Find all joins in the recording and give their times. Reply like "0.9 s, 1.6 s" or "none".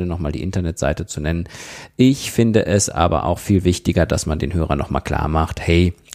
none

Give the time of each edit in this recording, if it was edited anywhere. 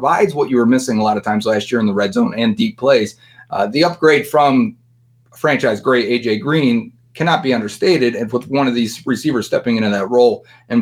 none

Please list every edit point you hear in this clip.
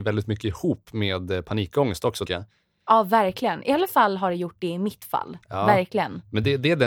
2.3 s, 5.4 s

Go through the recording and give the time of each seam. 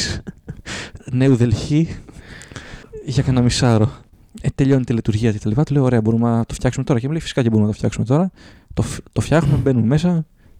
none

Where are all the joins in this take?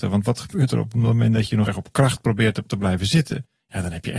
1.7 s, 2.7 s

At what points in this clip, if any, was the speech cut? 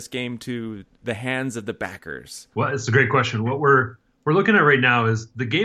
2.5 s

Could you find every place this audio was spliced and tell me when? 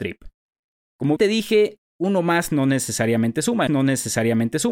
1.2 s, 3.7 s

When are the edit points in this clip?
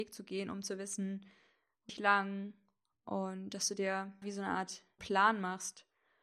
1.9 s, 4.2 s, 5.0 s

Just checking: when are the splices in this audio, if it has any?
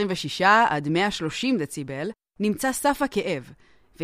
none

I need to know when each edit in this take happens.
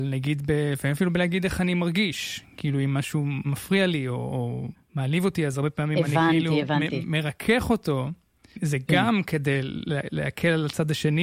none

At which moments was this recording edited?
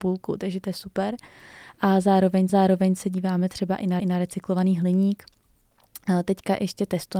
2.5 s, 4.0 s

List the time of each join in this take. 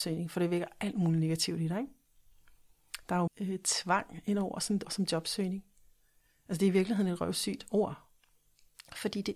3.3 s, 4.8 s

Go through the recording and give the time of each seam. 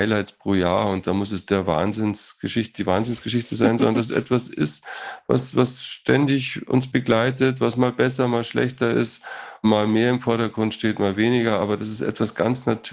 none

